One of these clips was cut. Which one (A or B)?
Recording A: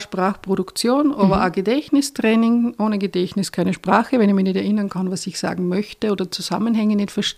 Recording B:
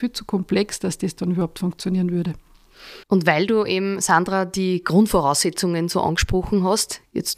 B